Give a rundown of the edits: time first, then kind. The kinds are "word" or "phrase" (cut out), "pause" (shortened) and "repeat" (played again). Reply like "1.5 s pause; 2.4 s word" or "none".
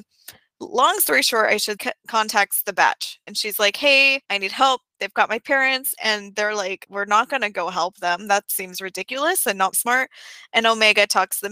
1.8 s phrase; 3.3 s word; 4.2 s pause; 6.9 s word; 9.7 s word